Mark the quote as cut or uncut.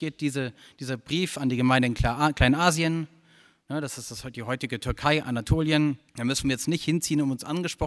cut